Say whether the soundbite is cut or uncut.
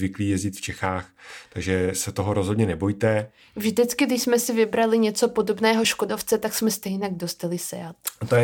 uncut